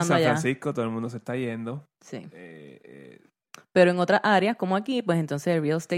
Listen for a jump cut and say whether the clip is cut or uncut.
uncut